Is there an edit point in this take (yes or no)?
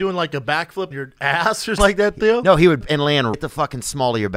yes